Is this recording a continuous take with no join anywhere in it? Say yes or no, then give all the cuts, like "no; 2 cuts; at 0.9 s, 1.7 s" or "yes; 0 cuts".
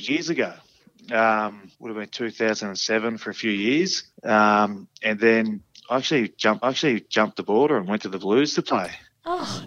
no; 3 cuts; at 1.7 s, 4.1 s, 6.6 s